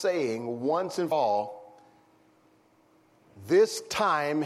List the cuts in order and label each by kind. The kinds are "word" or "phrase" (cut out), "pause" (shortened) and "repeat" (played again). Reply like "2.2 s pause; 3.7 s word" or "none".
1.1 s word